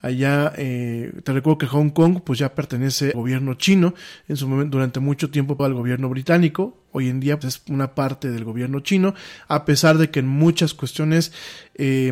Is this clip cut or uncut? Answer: cut